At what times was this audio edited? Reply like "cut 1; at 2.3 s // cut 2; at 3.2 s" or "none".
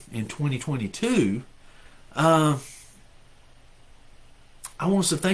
none